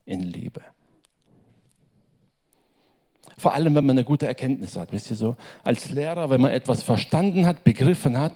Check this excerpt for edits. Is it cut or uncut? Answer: uncut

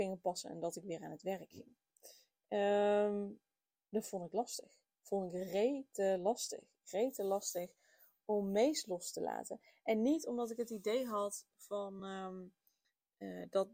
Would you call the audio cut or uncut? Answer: uncut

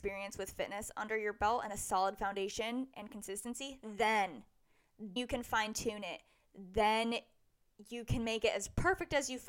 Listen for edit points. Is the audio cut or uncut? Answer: cut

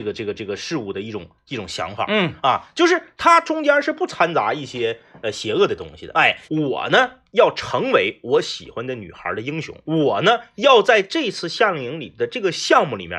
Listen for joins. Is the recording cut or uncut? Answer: cut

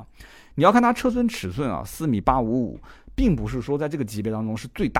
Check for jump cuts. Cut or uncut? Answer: uncut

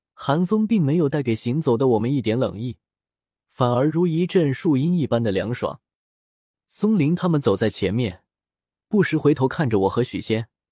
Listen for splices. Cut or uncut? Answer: uncut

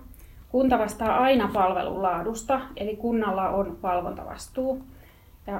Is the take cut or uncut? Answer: uncut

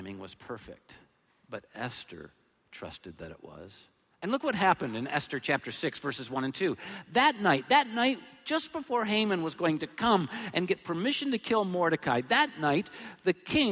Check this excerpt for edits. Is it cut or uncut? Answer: uncut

